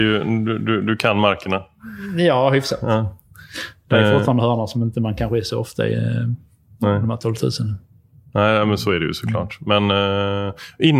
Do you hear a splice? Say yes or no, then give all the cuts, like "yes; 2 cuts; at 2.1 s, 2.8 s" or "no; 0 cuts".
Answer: no; 0 cuts